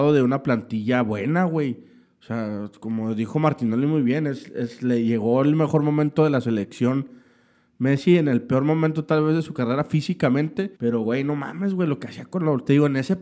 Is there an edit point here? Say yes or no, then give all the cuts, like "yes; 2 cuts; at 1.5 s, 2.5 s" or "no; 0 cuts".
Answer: yes; 1 cut; at 10.8 s